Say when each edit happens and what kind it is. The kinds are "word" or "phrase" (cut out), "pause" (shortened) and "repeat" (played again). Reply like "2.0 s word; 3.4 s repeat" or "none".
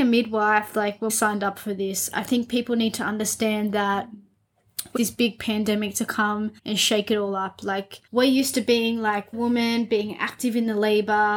1.1 s word; 5.0 s phrase; 6.6 s pause; 8.1 s pause; 9.3 s phrase